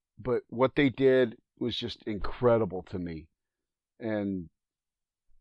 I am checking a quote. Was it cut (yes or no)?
no